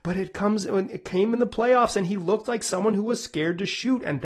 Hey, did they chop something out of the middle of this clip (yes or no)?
no